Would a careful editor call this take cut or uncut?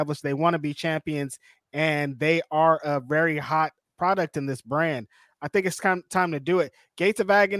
uncut